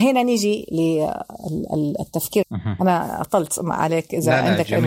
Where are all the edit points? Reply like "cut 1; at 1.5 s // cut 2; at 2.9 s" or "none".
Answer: cut 1; at 2.4 s